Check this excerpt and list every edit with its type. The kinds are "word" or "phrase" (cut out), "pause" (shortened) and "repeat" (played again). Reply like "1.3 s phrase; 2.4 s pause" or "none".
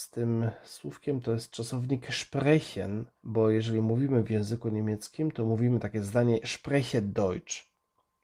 3.1 s pause; 6.4 s word